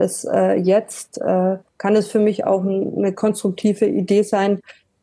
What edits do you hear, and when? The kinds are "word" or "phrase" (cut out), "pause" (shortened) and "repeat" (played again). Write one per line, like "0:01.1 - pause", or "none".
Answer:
0:01.7 - pause